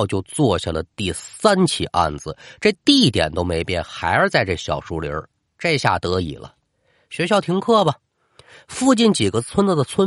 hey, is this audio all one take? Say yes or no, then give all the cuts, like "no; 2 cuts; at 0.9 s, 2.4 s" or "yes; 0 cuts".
yes; 0 cuts